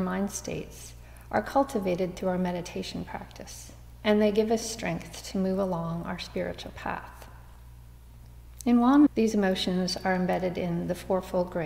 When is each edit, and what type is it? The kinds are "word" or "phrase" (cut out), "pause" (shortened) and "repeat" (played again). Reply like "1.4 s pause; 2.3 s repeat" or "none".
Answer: 9.1 s word